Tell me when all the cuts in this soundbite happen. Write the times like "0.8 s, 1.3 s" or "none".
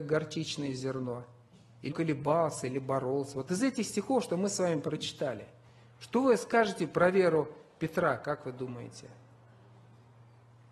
1.9 s